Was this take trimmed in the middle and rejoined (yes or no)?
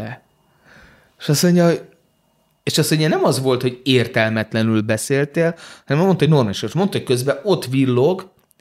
no